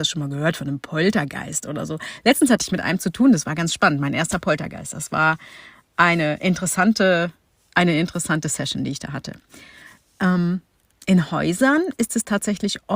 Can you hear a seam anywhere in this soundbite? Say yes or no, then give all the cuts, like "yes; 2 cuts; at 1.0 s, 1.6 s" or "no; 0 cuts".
no; 0 cuts